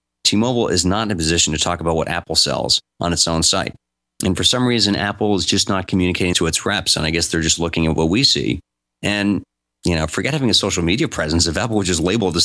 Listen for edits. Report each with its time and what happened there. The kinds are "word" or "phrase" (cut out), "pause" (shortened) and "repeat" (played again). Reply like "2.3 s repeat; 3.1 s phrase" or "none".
6.3 s word